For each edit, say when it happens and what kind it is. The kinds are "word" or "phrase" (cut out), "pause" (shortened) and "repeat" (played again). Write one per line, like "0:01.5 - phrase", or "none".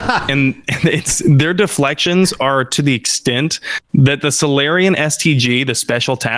0:03.8 - pause